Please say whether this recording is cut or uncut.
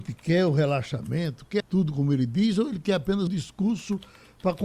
cut